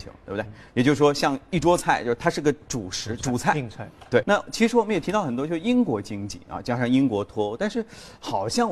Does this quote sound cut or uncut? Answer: cut